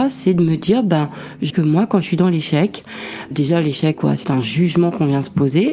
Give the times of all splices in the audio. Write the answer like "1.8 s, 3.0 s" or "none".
1.5 s, 3.3 s, 3.9 s, 4.2 s